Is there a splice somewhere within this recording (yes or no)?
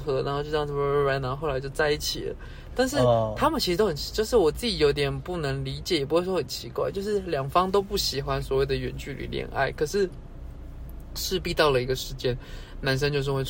no